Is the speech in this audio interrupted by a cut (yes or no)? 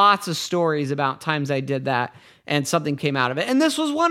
yes